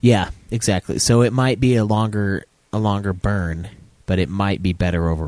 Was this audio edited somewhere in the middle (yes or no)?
yes